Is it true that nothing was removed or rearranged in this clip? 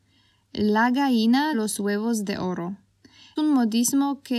no; 2 cuts; at 1.5 s, 3.4 s

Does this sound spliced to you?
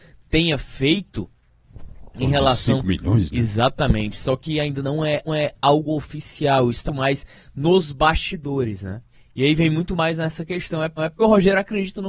yes; 4 cuts; at 5.3 s, 6.9 s, 9.1 s, 11.0 s

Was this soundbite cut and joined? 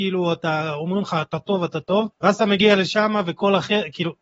yes; 1 cut; at 2.1 s

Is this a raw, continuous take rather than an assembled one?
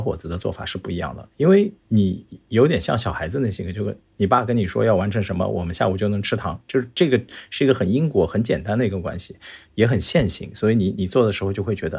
no; 1 cut; at 1.8 s

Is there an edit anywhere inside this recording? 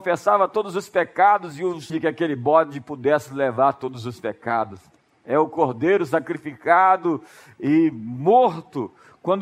yes; 1 cut; at 1.9 s

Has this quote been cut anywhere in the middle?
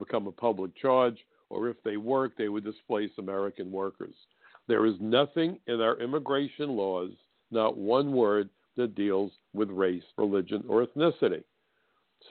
yes; 1 cut; at 10.1 s

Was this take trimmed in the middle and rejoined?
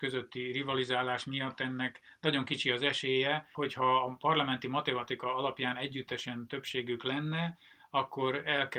no; 0 cuts

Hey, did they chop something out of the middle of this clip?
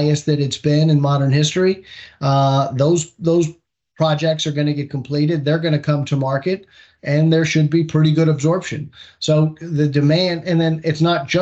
no; 0 cuts

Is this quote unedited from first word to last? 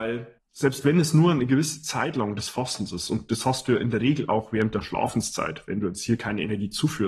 yes; 0 cuts

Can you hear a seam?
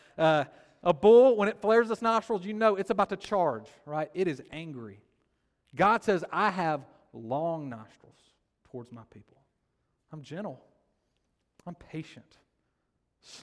no; 0 cuts

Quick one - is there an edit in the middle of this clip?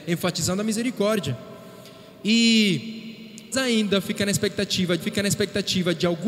yes; 2 cuts; at 3.5 s, 5.0 s

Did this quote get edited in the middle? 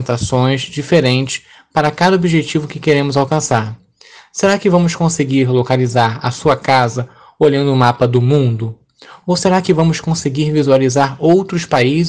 no; 0 cuts

